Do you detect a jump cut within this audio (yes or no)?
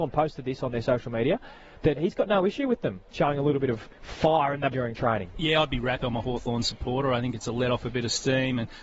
yes